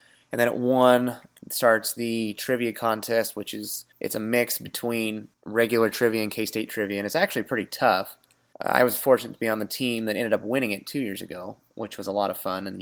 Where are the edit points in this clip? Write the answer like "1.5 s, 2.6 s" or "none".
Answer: none